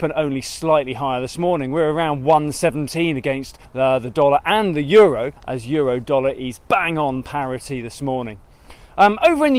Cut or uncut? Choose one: cut